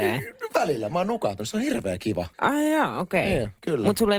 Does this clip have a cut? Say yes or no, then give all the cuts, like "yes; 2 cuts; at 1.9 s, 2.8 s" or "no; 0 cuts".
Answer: yes; 1 cut; at 2.3 s